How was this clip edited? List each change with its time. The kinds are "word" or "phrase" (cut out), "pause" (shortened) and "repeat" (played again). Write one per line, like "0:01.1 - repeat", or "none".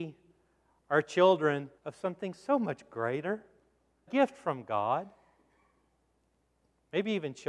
0:01.8 - pause
0:04.1 - word